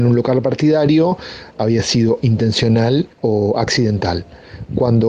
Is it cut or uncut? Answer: cut